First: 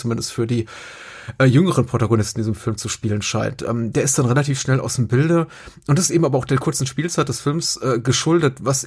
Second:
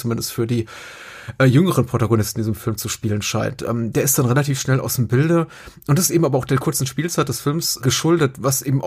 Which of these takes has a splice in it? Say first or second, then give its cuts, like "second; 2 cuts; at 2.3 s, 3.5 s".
second; 1 cut; at 7.8 s